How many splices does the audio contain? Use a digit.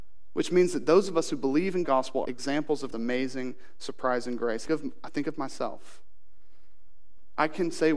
4